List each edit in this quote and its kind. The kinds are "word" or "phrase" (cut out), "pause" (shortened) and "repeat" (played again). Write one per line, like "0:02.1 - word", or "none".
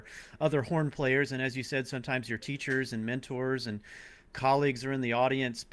none